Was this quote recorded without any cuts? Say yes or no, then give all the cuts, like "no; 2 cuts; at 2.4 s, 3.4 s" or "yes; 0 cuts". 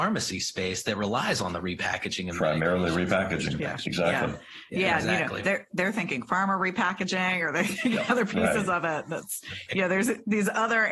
yes; 0 cuts